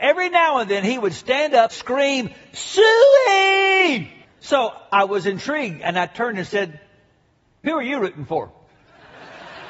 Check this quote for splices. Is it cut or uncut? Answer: cut